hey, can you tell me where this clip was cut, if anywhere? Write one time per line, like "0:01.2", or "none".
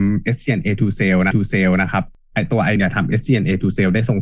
0:01.3
0:02.8